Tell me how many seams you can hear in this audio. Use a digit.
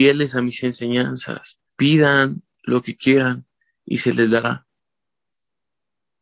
1